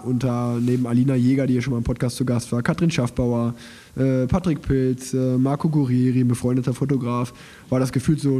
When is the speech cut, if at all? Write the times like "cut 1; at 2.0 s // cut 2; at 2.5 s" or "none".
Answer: none